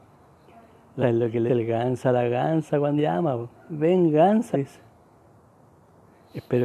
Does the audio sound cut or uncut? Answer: cut